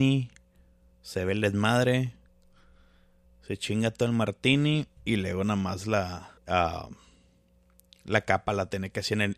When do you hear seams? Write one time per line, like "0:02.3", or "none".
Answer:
0:05.0
0:06.4

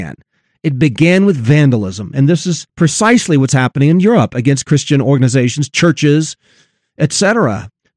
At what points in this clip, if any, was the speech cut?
0:02.7

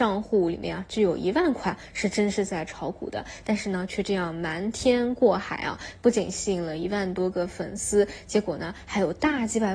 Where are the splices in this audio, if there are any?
none

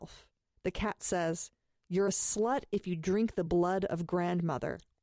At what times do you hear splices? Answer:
none

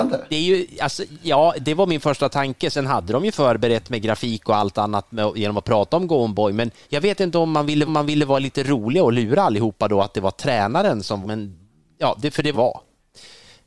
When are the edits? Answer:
0:06.8
0:07.9
0:11.2
0:11.7
0:12.5

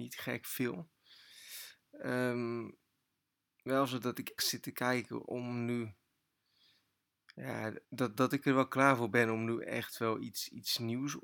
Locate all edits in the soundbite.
0:04.4
0:05.2
0:07.8

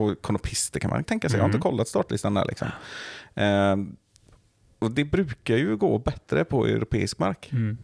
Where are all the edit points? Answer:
0:01.0

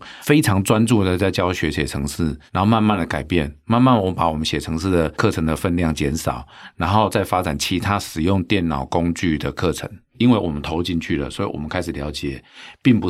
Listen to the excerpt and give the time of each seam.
0:02.5

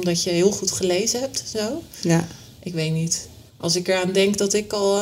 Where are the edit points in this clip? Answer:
0:03.5

